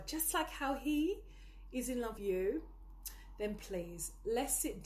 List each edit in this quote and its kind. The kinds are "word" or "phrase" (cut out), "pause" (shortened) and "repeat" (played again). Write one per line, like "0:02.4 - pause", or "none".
0:02.2 - word